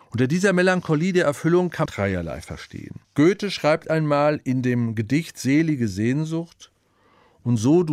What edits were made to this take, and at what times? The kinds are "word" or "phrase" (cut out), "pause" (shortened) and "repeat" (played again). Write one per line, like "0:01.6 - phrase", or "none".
0:01.9 - word
0:03.0 - pause